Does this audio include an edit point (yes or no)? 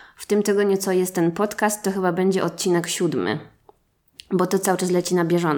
no